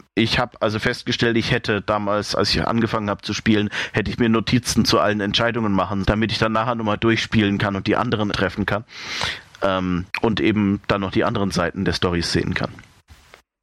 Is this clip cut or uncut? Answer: cut